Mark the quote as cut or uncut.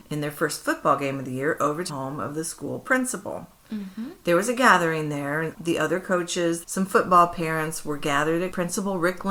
cut